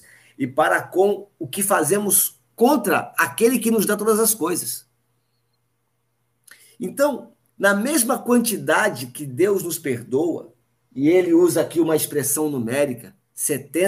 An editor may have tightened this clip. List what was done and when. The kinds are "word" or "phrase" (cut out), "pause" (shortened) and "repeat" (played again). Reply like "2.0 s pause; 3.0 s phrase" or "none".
7.5 s pause; 10.6 s pause